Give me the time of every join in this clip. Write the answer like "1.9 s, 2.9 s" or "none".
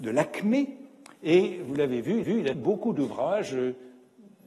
1.1 s, 2.2 s, 2.5 s